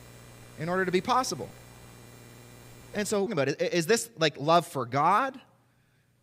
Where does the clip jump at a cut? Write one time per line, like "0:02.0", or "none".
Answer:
0:03.3